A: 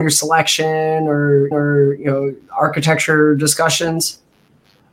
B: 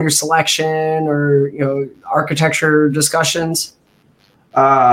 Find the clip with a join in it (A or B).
A